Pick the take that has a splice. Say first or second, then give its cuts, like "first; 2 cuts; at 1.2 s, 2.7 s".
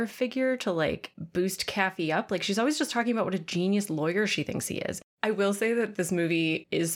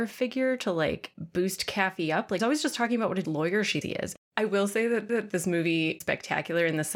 second; 5 cuts; at 2.4 s, 3.2 s, 3.8 s, 5.1 s, 6.0 s